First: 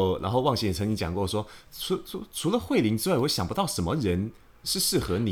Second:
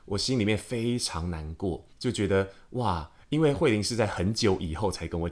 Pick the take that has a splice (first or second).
second